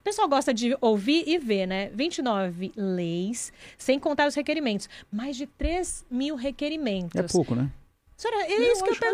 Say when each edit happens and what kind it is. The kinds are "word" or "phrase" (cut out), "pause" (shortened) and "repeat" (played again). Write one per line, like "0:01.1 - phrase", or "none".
none